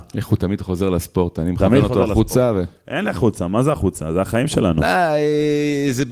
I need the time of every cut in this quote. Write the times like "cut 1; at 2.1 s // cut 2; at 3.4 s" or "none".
none